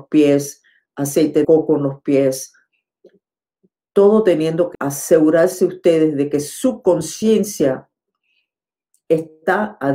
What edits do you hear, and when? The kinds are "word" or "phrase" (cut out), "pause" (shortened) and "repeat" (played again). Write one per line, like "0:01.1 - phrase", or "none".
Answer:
0:01.4 - word
0:04.7 - phrase